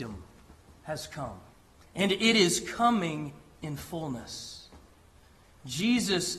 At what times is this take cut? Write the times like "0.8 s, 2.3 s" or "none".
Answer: 1.5 s

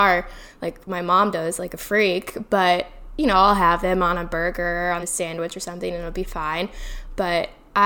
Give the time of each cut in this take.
5.0 s

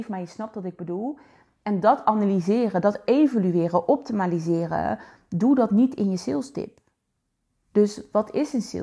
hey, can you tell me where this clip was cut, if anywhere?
none

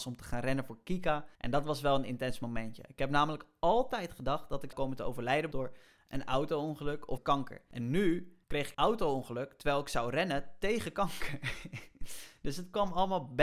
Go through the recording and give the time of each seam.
1.3 s, 4.7 s, 5.5 s, 7.2 s, 8.4 s, 8.7 s

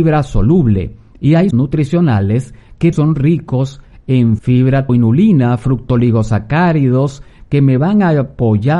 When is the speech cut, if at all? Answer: 1.5 s, 2.9 s, 4.4 s, 4.9 s

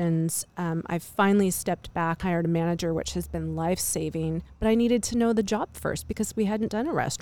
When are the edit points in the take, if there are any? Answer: 2.2 s

